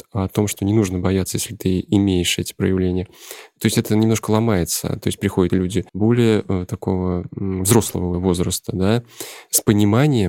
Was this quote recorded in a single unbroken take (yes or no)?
no